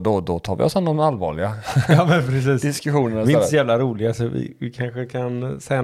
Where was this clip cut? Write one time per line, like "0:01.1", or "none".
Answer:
none